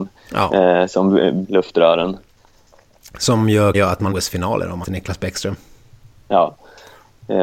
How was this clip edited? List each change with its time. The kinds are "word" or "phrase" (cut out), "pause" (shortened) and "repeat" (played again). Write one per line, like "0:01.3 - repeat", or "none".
0:01.4 - word
0:03.7 - word
0:04.1 - word
0:04.8 - word

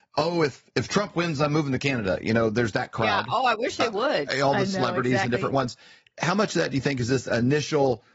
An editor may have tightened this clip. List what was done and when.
none

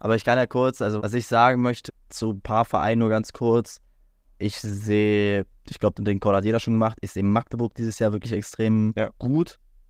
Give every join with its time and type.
0:01.0 - word
0:01.9 - word
0:05.9 - word

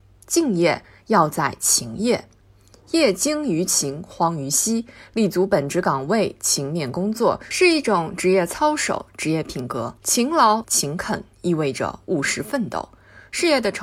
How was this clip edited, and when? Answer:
0:10.0 - pause
0:10.6 - phrase

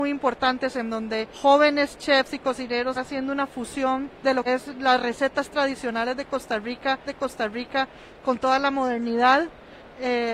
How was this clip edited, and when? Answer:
0:01.3 - pause
0:02.9 - word
0:04.1 - pause
0:04.5 - word
0:07.1 - repeat

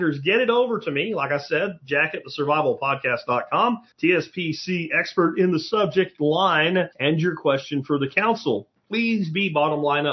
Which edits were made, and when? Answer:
0:03.9 - pause
0:06.9 - pause

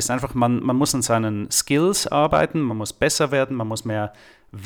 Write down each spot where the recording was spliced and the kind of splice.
none

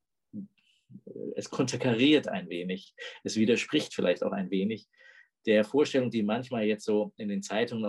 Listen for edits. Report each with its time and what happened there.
none

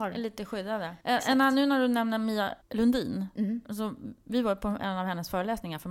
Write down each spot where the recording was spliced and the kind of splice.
0:01.0 - pause
0:02.6 - pause

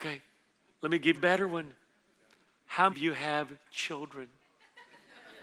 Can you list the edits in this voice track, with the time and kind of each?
0:01.1 - word
0:02.9 - word

